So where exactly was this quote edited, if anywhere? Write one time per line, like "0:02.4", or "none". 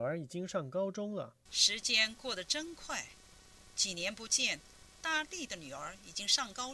0:01.4